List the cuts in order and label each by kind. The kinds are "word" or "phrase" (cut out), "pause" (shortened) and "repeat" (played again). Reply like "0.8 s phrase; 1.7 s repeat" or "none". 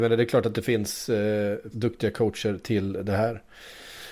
1.7 s word